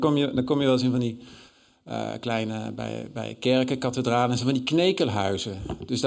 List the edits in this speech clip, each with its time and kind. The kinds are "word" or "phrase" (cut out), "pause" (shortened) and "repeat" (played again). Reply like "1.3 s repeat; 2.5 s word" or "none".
none